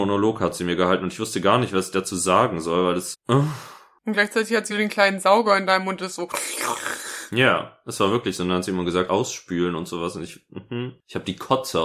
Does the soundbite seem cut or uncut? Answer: cut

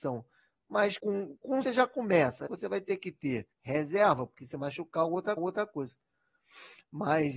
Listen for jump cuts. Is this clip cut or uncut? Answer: cut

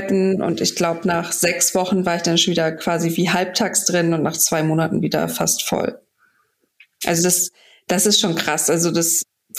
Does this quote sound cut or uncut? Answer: uncut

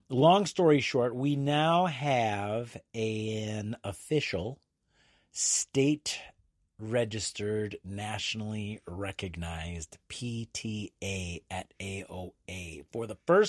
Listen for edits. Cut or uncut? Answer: uncut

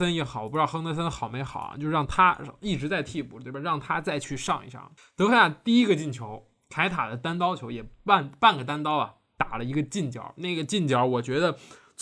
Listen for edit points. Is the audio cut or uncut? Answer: cut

